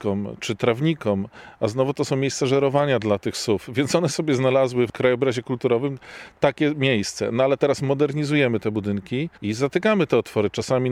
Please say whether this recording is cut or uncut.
cut